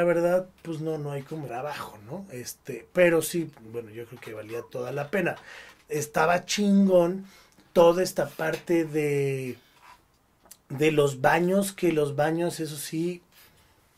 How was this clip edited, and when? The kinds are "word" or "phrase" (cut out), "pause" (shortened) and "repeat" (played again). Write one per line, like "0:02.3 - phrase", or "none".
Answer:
0:01.5 - word